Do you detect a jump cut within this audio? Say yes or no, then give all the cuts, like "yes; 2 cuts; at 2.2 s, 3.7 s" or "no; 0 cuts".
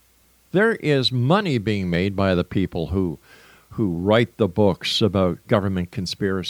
no; 0 cuts